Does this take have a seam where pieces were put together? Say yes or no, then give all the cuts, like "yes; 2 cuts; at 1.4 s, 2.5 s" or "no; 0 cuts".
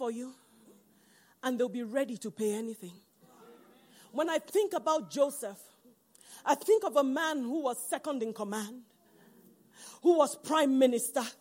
no; 0 cuts